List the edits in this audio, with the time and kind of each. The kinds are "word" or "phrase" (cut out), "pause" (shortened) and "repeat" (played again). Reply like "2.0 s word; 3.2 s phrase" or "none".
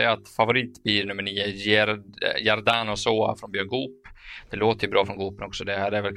none